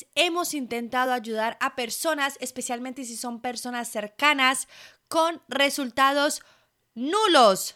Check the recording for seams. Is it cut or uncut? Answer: uncut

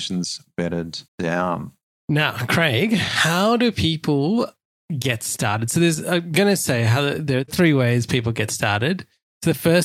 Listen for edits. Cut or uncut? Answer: cut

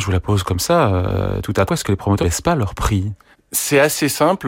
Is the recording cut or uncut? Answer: cut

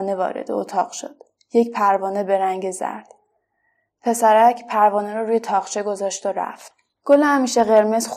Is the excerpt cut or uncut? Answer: uncut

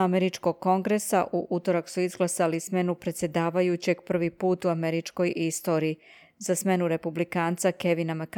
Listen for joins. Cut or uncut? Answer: uncut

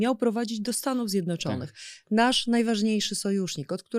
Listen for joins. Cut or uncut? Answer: uncut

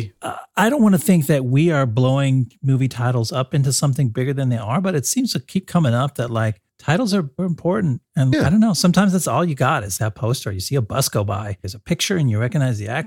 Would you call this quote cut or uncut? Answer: uncut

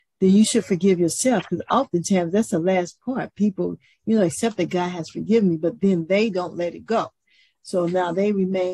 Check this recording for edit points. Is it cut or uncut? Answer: uncut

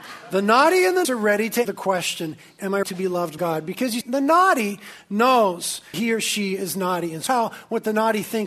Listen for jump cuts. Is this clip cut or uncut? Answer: cut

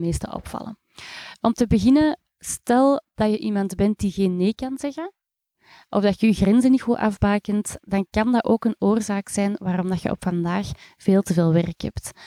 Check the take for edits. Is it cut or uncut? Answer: uncut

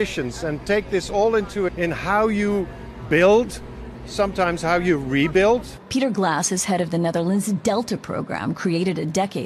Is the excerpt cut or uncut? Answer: cut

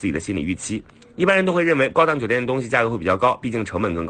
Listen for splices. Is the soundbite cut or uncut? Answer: uncut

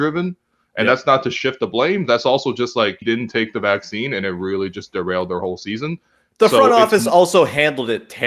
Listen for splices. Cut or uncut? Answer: cut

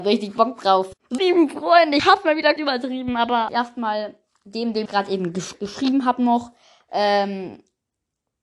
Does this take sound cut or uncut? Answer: cut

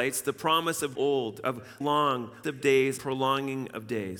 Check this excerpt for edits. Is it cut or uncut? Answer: cut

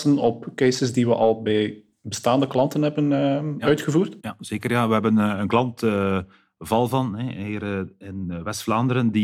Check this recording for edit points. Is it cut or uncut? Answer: uncut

